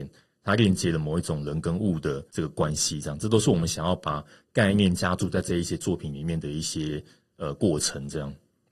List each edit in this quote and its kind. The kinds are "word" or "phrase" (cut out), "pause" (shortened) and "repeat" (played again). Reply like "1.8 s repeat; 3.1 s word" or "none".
2.3 s pause